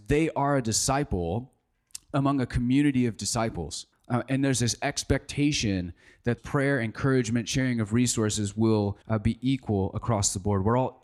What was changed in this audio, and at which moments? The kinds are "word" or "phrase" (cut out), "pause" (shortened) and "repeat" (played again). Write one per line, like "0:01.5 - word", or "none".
0:03.9 - pause
0:06.4 - word
0:09.0 - pause